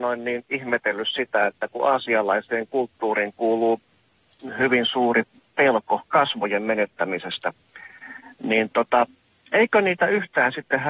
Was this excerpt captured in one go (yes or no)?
yes